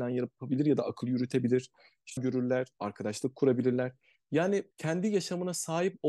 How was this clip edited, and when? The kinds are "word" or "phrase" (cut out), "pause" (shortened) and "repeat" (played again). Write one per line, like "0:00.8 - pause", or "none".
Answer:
0:02.2 - word
0:04.7 - pause